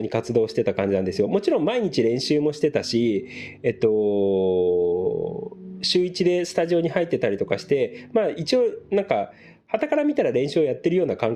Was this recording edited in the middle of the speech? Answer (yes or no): no